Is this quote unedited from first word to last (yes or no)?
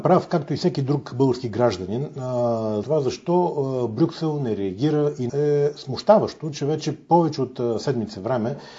no